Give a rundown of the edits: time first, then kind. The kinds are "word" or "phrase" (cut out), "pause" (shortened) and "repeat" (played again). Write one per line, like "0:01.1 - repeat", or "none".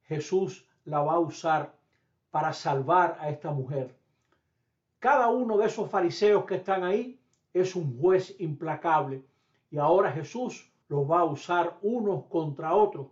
0:10.8 - pause